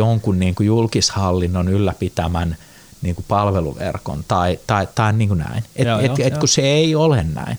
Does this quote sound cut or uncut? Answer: uncut